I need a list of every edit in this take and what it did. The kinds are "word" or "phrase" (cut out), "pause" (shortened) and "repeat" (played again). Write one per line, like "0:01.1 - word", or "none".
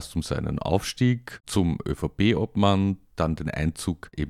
none